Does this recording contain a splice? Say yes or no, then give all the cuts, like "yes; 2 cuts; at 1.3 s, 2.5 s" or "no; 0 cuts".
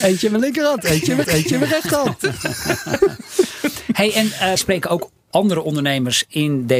yes; 3 cuts; at 1.2 s, 4.6 s, 5.3 s